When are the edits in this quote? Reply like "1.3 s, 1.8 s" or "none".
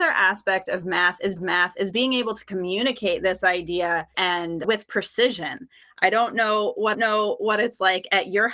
1.4 s, 4.1 s, 6.9 s